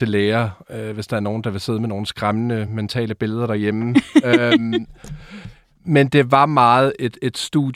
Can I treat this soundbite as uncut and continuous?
yes; 0 cuts

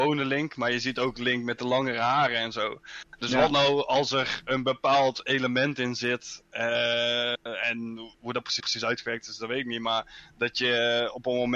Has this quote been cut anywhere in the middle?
yes; 2 cuts; at 8.1 s, 8.6 s

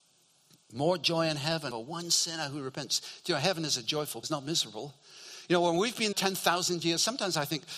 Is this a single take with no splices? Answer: no; 3 cuts; at 1.7 s, 4.2 s, 6.1 s

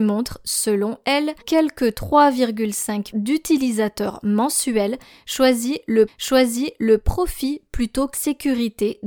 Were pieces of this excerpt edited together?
yes; 4 cuts; at 1.4 s, 3.1 s, 6.1 s, 8.1 s

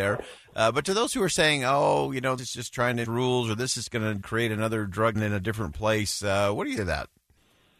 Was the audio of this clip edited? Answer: yes; 5 cuts; at 2.4 s, 3.0 s, 4.2 s, 5.1 s, 6.8 s

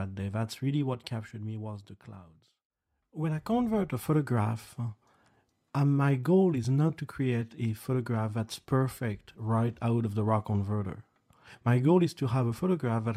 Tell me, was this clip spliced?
no; 0 cuts

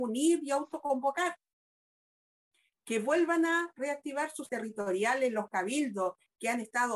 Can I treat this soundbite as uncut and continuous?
no; 1 cut; at 4.5 s

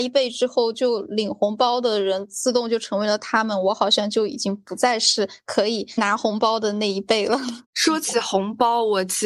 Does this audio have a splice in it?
yes; 1 cut; at 7.6 s

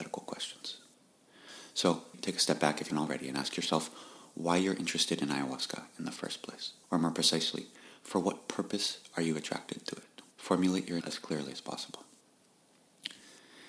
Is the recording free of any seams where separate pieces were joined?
no; 5 cuts; at 2.1 s, 2.9 s, 6.8 s, 10.3 s, 11.0 s

